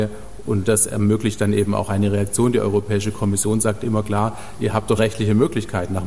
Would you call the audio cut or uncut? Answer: cut